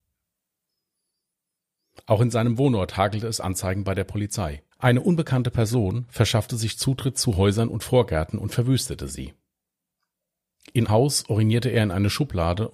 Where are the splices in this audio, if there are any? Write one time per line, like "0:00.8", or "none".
0:04.7
0:10.9